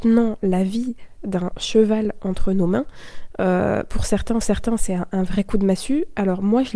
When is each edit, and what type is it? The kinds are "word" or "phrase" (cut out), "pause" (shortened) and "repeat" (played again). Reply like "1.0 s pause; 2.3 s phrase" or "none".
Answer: 4.4 s repeat